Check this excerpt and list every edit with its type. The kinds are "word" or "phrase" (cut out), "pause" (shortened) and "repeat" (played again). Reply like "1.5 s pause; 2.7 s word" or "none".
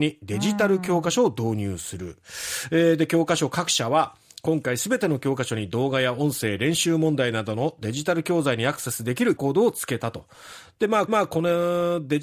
9.4 s word; 11.1 s repeat